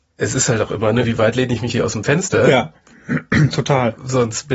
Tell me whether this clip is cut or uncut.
cut